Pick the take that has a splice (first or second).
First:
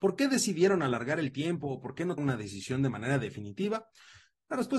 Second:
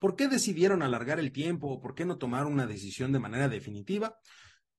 first